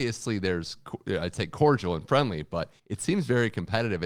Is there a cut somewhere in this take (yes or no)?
yes